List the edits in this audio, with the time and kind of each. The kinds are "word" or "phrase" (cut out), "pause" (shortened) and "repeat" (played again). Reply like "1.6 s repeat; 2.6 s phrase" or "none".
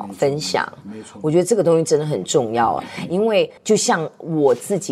3.6 s pause